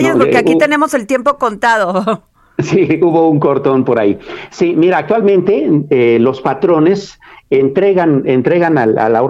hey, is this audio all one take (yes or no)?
yes